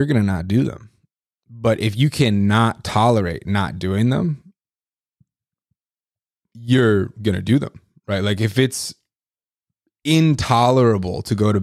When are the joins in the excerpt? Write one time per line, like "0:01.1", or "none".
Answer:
none